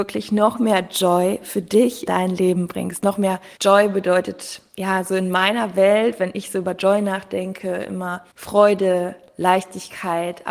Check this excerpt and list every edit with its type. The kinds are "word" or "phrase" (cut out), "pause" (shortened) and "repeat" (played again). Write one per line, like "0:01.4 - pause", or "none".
0:02.1 - word
0:03.6 - pause
0:08.3 - pause